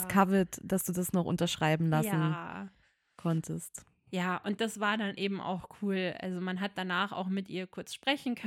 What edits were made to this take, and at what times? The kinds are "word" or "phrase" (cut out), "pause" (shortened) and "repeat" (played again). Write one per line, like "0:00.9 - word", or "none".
0:04.6 - word